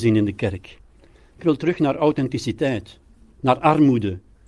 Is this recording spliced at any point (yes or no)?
yes